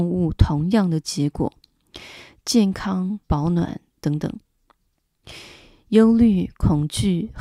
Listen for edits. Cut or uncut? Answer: cut